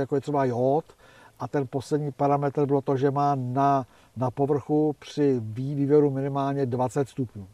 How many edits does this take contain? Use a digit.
0